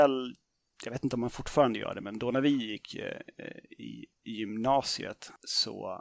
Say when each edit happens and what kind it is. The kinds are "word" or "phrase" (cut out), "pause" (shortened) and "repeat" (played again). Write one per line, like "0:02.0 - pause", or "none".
none